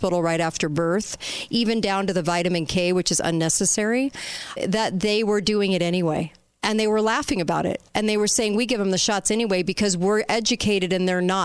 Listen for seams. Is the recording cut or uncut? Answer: cut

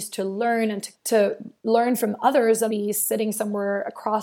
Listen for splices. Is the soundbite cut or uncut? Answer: cut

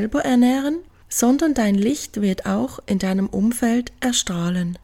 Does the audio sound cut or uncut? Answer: uncut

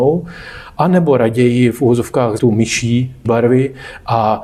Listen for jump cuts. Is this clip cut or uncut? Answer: cut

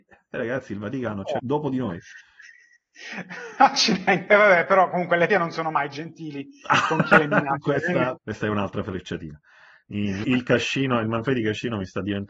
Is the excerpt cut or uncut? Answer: cut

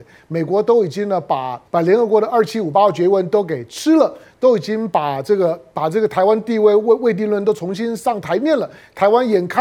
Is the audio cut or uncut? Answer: cut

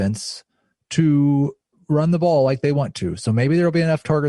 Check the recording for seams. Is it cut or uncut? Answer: uncut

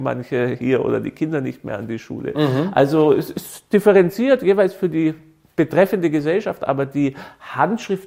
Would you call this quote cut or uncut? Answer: uncut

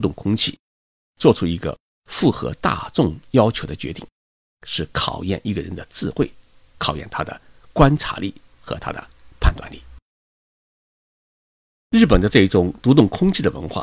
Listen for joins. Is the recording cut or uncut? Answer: uncut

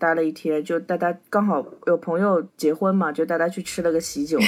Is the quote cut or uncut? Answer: cut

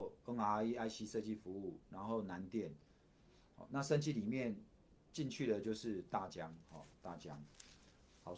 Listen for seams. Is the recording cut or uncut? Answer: uncut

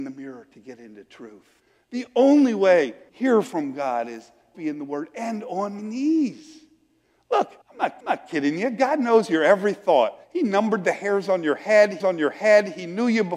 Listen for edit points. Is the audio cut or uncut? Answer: cut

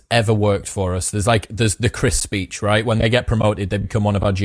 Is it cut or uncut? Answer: uncut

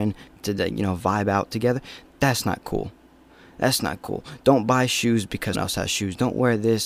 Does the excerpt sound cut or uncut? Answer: cut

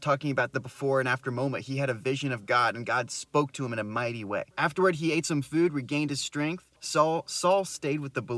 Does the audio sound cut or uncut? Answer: cut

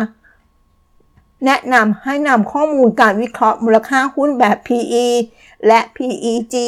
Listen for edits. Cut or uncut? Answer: uncut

